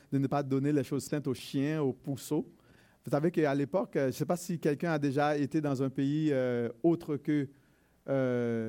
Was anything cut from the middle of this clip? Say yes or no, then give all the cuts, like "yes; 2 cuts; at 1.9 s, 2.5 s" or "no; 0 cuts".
no; 0 cuts